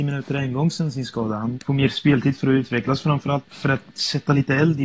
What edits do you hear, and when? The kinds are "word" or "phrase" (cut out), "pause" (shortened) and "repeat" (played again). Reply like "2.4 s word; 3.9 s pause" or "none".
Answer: 1.5 s word; 3.4 s word

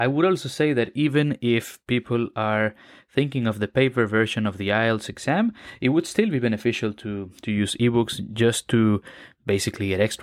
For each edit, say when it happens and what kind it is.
none

